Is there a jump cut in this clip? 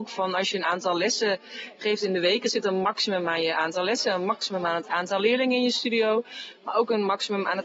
no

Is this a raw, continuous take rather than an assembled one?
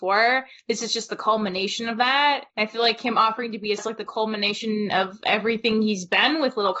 no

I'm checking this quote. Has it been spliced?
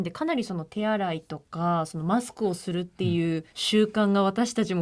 yes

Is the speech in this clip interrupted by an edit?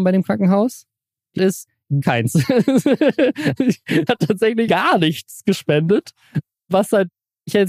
yes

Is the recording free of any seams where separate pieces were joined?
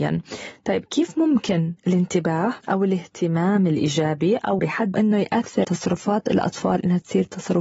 no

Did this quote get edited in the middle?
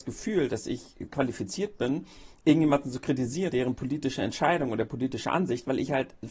yes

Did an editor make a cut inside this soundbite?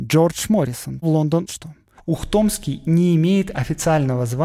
yes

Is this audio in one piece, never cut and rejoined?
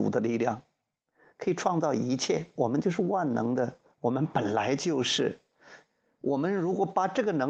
yes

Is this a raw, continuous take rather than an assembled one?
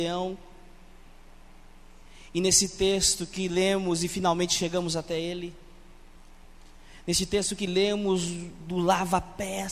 yes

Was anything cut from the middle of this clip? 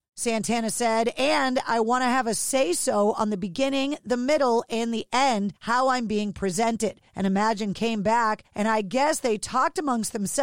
yes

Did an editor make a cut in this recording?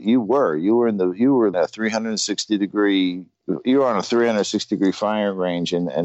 yes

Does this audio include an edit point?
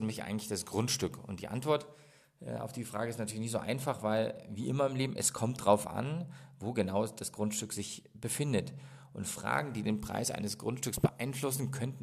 no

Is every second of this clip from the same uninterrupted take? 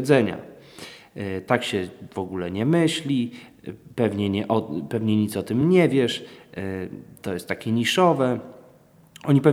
yes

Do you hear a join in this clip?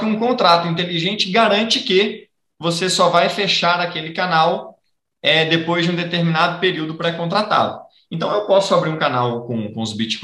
no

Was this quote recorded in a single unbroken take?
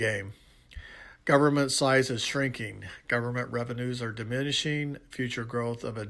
yes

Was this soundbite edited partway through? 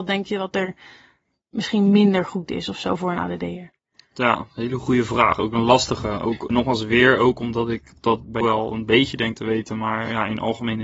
yes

